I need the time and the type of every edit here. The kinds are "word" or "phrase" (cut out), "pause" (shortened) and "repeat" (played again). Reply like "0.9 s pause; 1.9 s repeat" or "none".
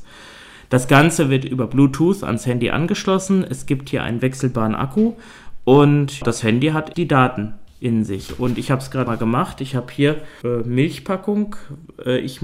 6.2 s word; 6.9 s word; 9.1 s word; 10.4 s word